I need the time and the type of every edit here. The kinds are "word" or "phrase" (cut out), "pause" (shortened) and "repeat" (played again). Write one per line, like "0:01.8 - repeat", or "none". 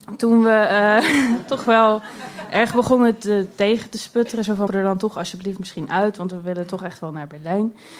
0:04.7 - word